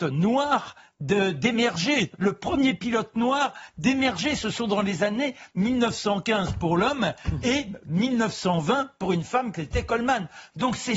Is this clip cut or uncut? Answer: uncut